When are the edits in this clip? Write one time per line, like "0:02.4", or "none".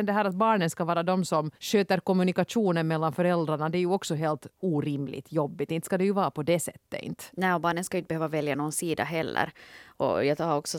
0:01.6